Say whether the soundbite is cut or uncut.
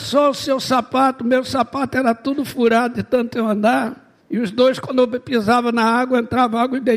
cut